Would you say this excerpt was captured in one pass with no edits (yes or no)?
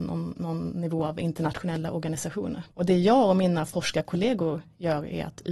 no